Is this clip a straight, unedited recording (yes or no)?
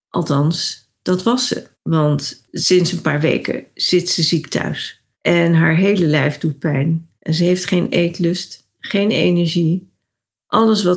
no